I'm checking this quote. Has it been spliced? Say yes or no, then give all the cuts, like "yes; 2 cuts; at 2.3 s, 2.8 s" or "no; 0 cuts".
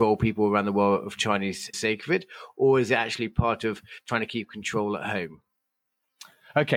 yes; 1 cut; at 1.7 s